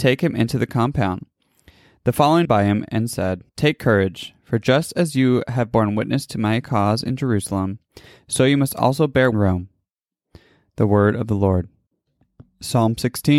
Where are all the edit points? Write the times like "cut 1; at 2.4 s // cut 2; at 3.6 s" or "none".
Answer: cut 1; at 2.4 s // cut 2; at 3.5 s // cut 3; at 9.3 s